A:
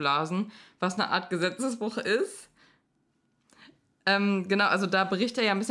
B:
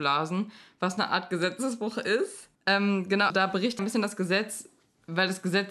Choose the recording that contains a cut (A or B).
B